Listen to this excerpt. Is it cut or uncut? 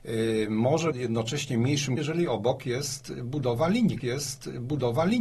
cut